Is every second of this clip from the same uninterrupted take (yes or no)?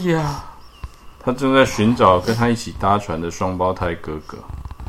no